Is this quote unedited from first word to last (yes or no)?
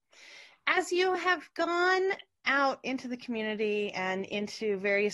yes